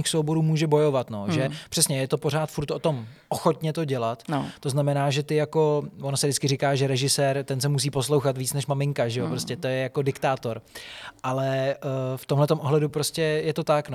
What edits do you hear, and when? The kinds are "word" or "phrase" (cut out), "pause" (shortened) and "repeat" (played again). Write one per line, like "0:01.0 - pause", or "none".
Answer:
none